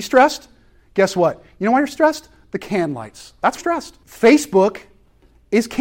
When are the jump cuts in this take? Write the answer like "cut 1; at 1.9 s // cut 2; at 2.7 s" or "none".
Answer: cut 1; at 3.6 s // cut 2; at 4.0 s